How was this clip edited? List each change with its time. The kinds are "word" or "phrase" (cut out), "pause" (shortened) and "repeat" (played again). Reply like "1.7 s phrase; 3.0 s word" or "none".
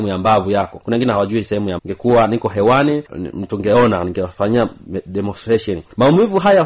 1.8 s word